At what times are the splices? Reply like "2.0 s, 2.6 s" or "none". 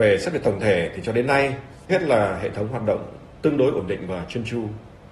1.9 s